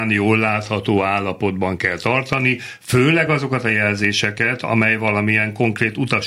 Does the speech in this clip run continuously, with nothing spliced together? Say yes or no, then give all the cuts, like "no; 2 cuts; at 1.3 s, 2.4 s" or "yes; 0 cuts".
yes; 0 cuts